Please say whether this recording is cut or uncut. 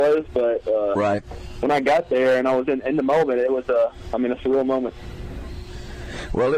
uncut